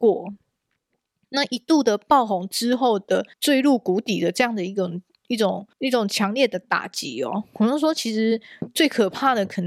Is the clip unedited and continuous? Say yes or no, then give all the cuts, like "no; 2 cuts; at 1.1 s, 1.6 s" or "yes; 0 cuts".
no; 2 cuts; at 3.3 s, 5.7 s